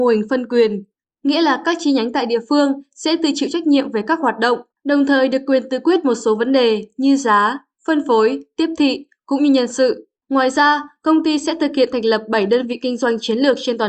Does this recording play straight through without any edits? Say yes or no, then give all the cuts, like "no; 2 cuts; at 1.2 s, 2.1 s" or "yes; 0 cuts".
no; 2 cuts; at 4.7 s, 10.2 s